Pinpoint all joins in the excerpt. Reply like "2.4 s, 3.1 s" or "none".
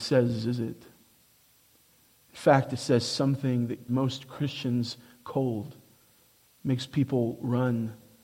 3.9 s